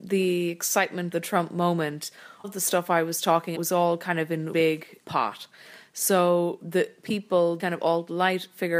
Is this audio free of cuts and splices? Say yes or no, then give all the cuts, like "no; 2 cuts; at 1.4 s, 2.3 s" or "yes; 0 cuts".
no; 6 cuts; at 1.1 s, 2.4 s, 3.5 s, 4.5 s, 5.0 s, 7.6 s